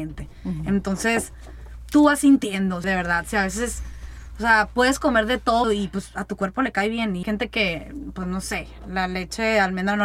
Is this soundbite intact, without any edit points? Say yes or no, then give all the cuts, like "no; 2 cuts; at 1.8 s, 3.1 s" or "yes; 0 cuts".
no; 3 cuts; at 2.8 s, 5.6 s, 7.2 s